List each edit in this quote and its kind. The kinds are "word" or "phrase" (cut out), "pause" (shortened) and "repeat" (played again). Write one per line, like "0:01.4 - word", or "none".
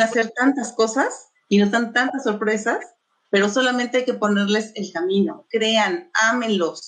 none